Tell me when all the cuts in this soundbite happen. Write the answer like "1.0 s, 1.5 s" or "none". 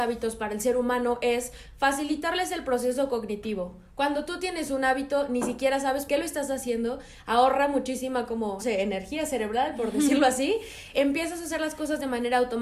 6.1 s, 8.6 s, 10.9 s